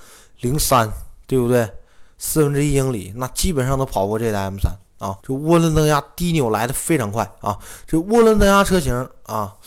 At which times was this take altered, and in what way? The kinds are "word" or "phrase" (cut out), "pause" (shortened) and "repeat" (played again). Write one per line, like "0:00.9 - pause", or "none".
0:05.2 - pause